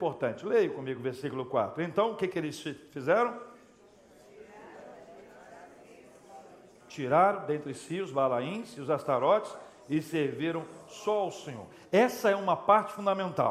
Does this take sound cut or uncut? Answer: uncut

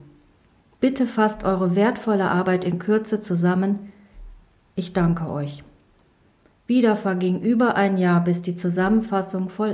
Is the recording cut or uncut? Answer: uncut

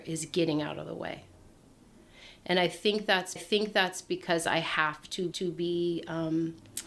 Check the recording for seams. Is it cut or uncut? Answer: cut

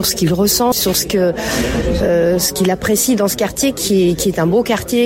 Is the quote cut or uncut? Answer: uncut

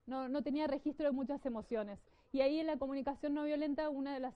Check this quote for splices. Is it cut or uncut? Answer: uncut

